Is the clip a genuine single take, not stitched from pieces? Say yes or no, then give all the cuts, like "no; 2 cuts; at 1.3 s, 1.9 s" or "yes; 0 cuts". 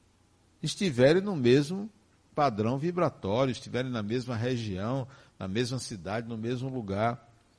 yes; 0 cuts